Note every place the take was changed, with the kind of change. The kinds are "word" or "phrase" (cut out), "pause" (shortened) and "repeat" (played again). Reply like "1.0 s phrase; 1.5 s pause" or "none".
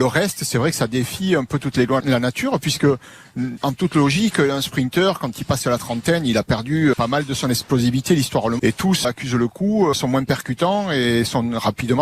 2.0 s word; 3.6 s word; 6.9 s word; 8.6 s word; 9.0 s word; 9.9 s word